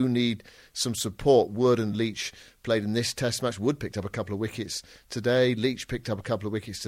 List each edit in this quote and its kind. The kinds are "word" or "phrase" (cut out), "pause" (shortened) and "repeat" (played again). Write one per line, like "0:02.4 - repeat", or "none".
none

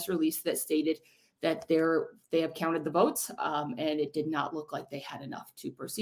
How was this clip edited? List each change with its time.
none

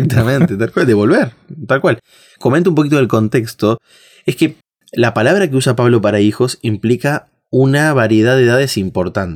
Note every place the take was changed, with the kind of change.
none

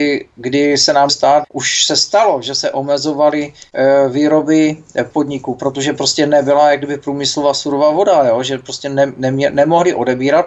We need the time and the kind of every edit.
0:01.1 - word
0:01.4 - word
0:05.1 - word

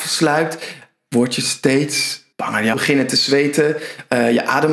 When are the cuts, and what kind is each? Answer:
0:02.3 - pause
0:02.7 - word

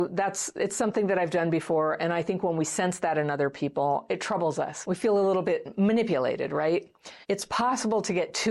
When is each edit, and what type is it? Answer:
0:07.2 - pause

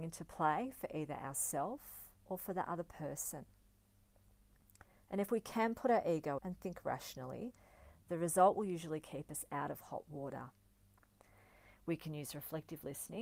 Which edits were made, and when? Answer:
0:06.4 - word

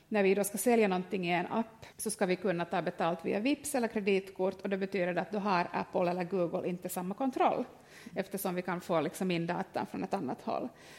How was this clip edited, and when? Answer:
0:01.9 - pause

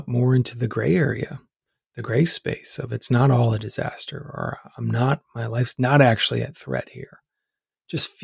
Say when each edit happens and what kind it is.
none

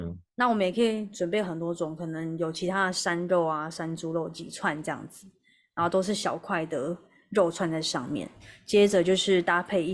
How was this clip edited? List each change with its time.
none

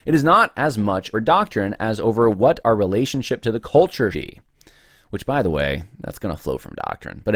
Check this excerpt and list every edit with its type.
0:01.1 - word
0:04.1 - word

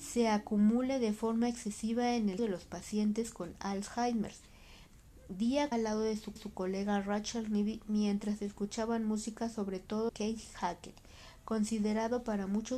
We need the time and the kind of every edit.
0:02.4 - word
0:05.7 - phrase
0:06.4 - repeat
0:10.1 - word

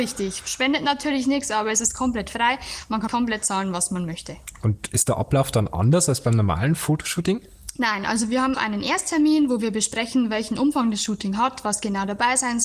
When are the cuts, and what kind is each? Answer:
0:03.1 - word
0:08.5 - word

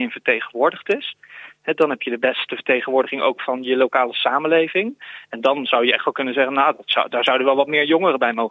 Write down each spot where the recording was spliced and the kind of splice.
none

